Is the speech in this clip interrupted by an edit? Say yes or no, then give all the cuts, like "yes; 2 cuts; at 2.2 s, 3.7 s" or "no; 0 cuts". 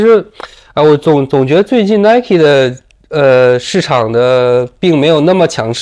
no; 0 cuts